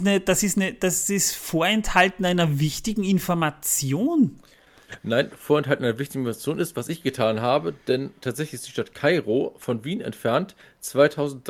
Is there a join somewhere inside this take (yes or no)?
no